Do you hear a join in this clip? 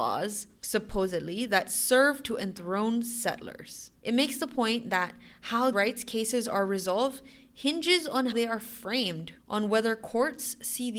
yes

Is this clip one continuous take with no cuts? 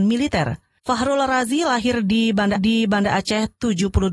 no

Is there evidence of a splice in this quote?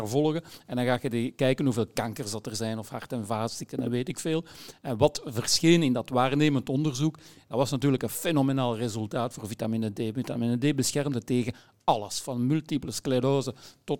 no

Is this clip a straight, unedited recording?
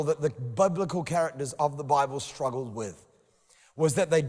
yes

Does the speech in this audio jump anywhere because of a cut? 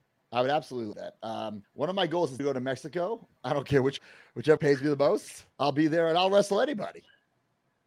yes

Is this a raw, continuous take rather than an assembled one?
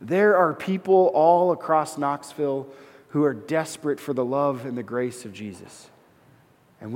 yes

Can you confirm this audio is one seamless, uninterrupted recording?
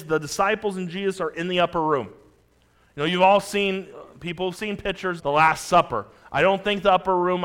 no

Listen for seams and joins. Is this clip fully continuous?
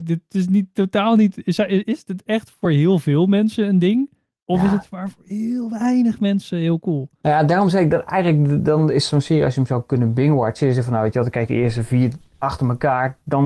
yes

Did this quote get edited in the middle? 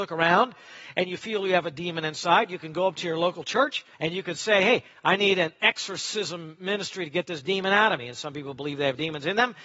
yes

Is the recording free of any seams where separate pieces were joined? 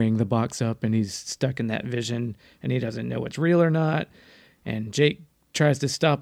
yes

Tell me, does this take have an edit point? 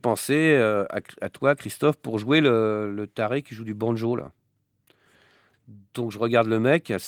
no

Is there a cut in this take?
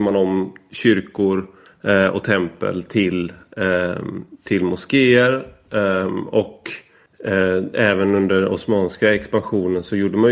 no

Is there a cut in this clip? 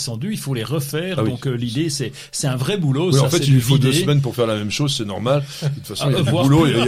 no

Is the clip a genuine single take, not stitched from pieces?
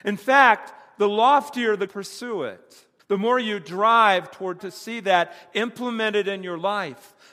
no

